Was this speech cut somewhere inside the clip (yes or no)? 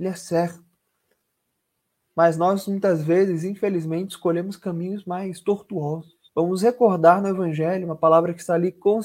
yes